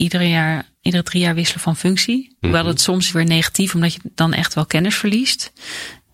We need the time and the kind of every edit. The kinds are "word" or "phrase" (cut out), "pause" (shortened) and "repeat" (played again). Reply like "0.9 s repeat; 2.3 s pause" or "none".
3.1 s phrase